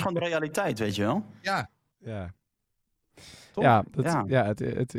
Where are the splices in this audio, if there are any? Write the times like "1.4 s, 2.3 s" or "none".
none